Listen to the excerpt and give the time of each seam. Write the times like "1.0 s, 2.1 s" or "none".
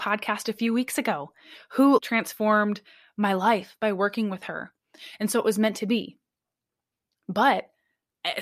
2.0 s